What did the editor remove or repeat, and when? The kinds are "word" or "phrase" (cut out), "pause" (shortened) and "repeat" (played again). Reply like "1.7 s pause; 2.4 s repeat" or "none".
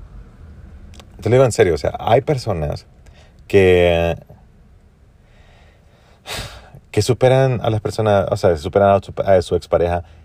none

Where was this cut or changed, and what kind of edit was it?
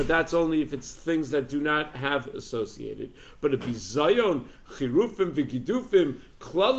2.3 s word

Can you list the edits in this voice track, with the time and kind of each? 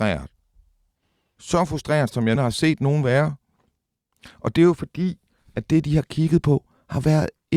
2.4 s word

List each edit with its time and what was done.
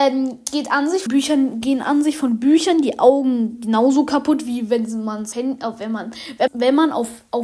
1.1 s word; 5.3 s word; 6.5 s word

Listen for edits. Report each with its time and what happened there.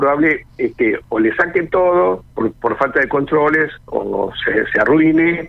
2.3 s pause; 3.9 s word

